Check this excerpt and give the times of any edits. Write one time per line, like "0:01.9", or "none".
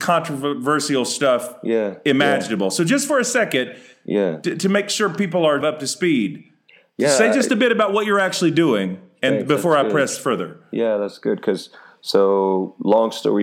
0:05.6